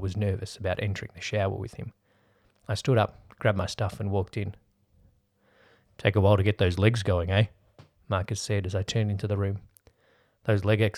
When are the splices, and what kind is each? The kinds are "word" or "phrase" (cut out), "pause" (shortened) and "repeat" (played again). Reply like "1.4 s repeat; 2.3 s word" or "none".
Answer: none